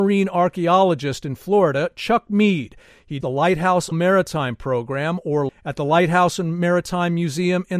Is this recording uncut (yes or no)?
no